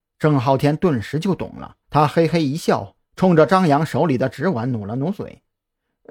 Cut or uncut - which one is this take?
cut